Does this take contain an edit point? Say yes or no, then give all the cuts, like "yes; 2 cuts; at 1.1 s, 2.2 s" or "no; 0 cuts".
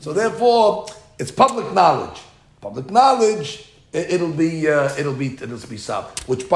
no; 0 cuts